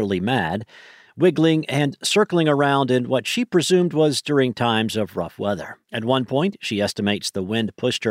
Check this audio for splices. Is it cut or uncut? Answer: cut